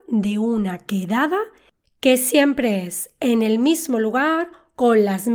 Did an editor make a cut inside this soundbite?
no; 0 cuts

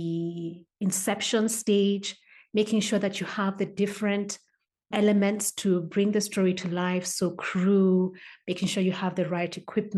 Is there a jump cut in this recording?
yes; 1 cut; at 4.9 s

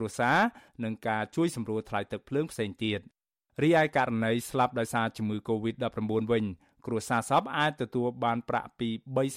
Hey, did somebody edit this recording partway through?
no; 0 cuts

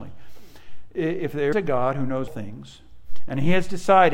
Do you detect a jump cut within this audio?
yes; 2 cuts; at 1.5 s, 2.3 s

